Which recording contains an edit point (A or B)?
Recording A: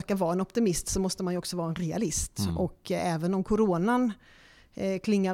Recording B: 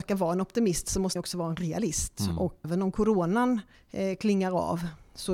B